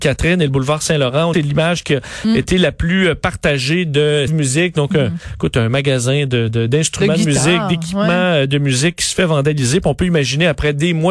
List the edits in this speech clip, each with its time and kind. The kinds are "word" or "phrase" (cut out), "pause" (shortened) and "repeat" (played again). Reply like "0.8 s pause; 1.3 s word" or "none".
1.3 s phrase; 4.3 s word